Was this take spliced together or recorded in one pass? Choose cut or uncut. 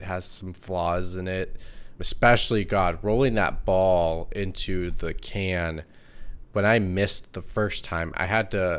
cut